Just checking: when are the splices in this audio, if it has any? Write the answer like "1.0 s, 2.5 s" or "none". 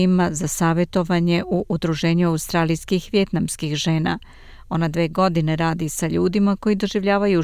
none